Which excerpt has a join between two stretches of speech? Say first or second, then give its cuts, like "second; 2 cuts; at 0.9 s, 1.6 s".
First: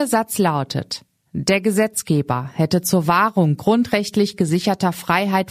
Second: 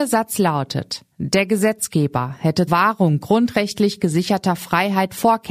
second; 2 cuts; at 1.1 s, 2.7 s